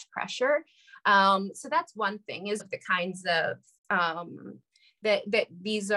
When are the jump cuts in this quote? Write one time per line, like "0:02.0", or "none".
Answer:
0:02.6